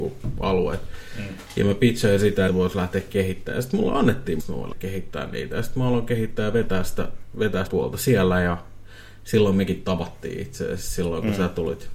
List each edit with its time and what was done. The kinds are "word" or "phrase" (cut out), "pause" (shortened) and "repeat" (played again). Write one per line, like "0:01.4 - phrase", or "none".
0:02.5 - phrase
0:04.4 - word
0:04.7 - word
0:07.7 - word